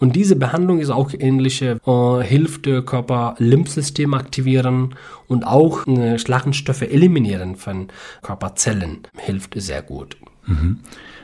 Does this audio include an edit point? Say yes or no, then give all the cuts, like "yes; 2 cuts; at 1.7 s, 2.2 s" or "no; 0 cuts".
yes; 2 cuts; at 1.8 s, 9.1 s